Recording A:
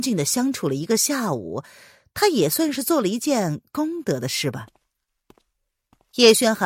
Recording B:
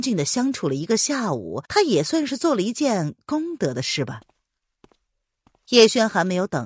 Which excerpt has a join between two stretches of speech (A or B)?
B